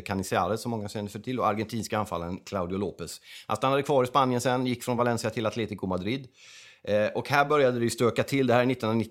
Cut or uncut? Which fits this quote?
uncut